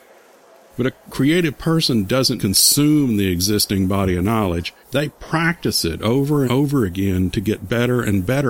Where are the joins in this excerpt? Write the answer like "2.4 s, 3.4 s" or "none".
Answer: 2.4 s, 4.8 s, 6.5 s